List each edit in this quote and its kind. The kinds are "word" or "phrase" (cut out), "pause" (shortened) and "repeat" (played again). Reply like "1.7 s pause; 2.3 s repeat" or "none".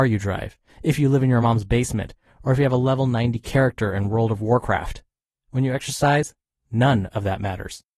none